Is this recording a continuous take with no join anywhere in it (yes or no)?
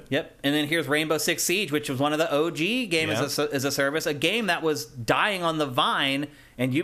yes